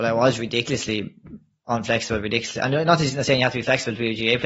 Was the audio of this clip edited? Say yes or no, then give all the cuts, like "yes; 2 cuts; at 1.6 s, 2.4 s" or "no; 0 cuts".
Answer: no; 0 cuts